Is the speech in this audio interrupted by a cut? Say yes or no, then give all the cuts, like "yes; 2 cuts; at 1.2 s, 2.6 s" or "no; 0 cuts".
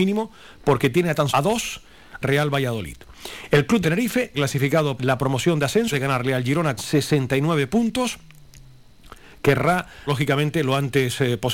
yes; 8 cuts; at 1.3 s, 2.2 s, 3.8 s, 4.3 s, 5.0 s, 5.9 s, 6.8 s, 10.1 s